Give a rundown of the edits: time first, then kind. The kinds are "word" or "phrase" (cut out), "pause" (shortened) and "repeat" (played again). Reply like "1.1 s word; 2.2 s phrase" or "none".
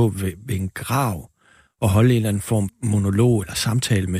2.7 s word